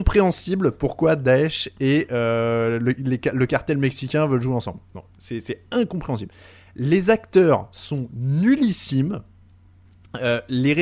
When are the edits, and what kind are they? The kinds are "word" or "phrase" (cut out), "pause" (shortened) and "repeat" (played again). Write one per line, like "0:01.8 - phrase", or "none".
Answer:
none